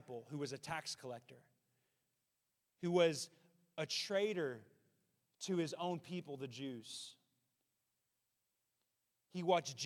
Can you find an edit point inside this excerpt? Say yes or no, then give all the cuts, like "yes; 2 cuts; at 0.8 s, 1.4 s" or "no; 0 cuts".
no; 0 cuts